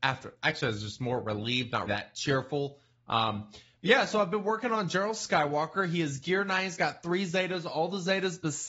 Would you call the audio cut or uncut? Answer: cut